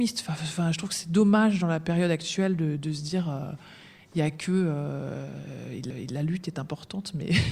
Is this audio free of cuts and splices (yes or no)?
no